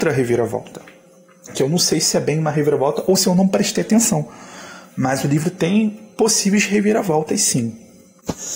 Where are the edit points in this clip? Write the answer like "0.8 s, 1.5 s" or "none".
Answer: 1.5 s, 6.1 s